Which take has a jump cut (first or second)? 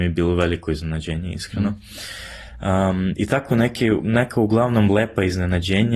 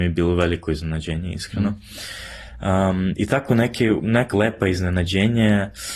second